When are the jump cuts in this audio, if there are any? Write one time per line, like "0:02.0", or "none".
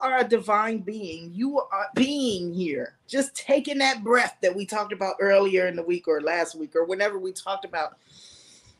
0:01.9
0:03.0